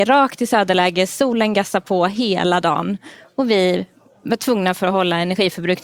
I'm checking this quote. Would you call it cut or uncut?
uncut